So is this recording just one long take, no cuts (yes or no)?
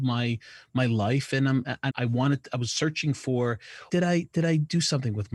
no